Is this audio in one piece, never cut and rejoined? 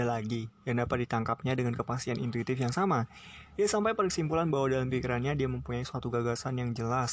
yes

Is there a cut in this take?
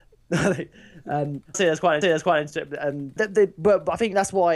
yes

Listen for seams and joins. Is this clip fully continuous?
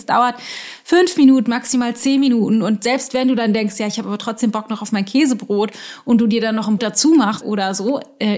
no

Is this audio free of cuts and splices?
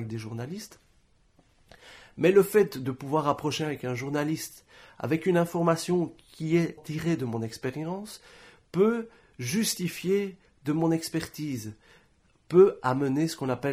no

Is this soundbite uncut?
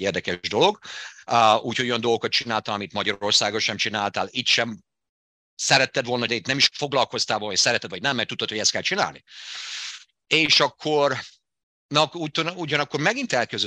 no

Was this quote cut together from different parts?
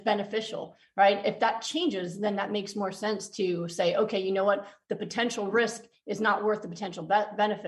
no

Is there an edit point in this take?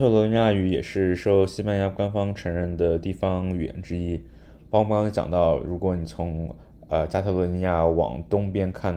no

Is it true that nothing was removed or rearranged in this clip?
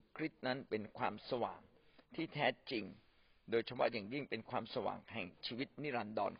yes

